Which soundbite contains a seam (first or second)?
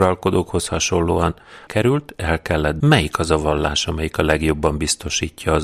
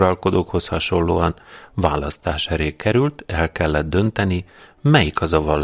first